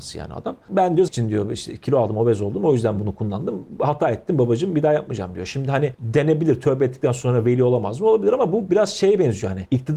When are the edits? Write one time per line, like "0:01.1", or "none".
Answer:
0:01.1